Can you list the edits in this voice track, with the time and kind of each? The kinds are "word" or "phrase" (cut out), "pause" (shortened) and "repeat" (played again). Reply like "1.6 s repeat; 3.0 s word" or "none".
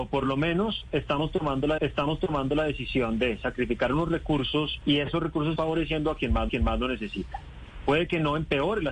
1.8 s repeat; 4.8 s word; 5.6 s phrase; 6.5 s repeat